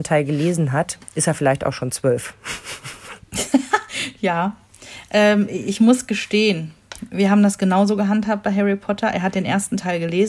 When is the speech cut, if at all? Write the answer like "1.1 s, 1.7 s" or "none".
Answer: none